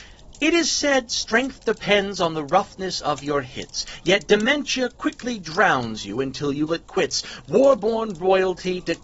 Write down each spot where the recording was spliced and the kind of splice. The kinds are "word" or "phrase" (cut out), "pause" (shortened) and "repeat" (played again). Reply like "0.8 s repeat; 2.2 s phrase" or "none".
6.7 s word